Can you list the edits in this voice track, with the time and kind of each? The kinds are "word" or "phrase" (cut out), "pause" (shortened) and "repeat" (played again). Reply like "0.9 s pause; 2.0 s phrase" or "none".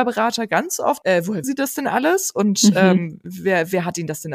1.0 s phrase; 1.4 s word